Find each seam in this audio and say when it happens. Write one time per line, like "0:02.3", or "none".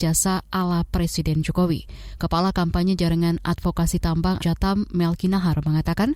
0:04.4